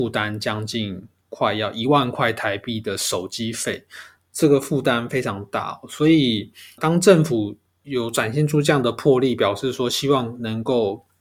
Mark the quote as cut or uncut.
cut